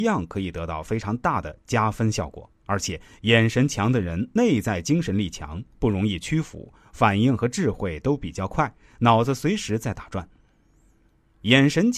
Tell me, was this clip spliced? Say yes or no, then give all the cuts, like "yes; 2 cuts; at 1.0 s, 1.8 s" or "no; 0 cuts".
yes; 1 cut; at 2.6 s